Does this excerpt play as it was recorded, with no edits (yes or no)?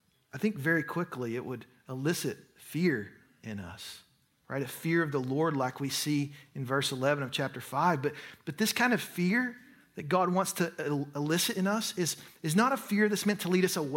yes